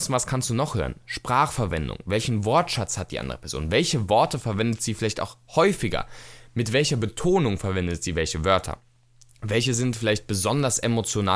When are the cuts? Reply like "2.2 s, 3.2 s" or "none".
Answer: none